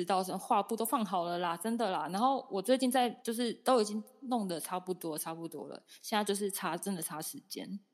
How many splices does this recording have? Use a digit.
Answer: 1